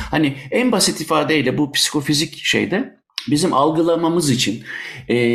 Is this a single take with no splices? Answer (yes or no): yes